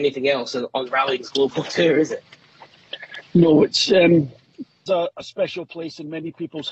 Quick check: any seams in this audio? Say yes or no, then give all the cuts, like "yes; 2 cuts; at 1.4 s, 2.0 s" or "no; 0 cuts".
yes; 1 cut; at 4.9 s